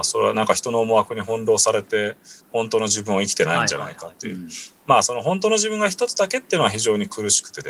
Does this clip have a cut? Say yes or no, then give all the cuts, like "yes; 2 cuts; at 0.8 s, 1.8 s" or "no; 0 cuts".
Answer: yes; 1 cut; at 2.4 s